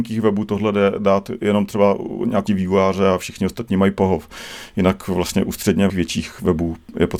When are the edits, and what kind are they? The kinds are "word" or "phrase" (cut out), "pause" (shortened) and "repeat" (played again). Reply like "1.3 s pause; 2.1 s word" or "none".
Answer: 2.5 s word; 5.9 s word